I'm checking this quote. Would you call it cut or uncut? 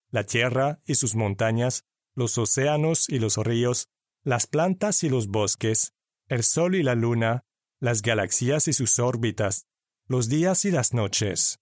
uncut